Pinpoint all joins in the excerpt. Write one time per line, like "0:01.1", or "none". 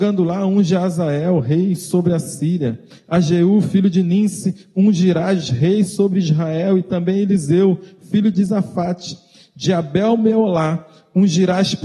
none